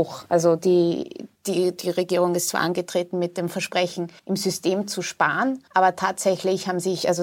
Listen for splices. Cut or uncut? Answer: cut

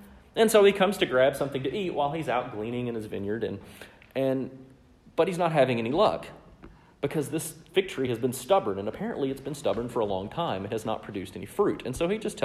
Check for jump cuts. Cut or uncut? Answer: uncut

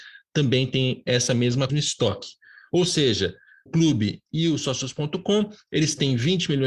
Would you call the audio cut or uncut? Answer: cut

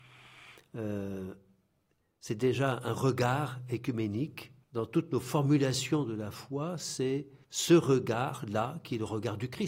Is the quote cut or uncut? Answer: cut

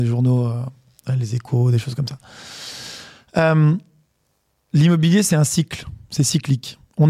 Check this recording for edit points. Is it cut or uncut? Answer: uncut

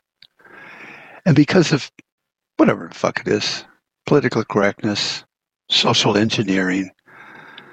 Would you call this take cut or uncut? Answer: uncut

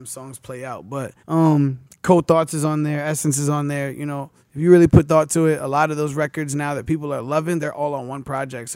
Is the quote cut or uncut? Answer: cut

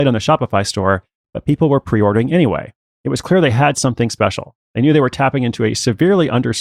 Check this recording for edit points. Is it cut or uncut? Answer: uncut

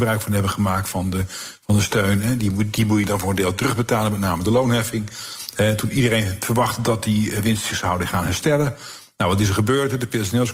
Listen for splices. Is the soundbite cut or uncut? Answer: uncut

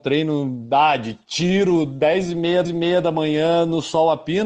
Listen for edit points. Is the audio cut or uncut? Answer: cut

